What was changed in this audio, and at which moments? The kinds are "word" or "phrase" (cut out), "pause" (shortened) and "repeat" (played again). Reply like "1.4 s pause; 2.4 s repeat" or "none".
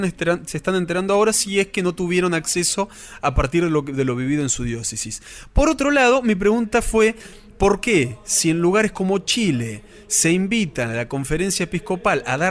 none